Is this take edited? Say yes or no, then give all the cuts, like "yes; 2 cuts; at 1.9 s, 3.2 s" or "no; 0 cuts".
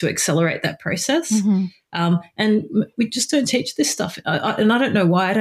no; 0 cuts